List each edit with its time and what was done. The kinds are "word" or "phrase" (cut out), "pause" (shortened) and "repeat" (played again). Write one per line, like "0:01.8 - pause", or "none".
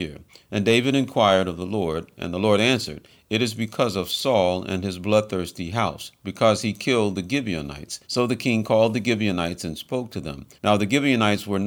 0:08.0 - pause
0:10.6 - pause